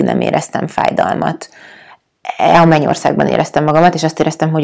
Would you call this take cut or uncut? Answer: uncut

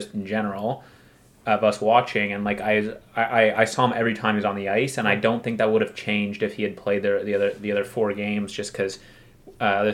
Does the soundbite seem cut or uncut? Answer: uncut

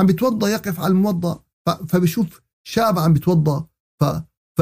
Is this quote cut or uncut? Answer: uncut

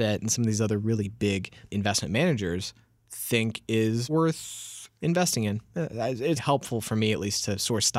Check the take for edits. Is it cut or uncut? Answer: cut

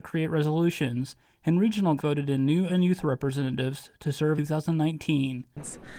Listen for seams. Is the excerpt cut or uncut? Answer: cut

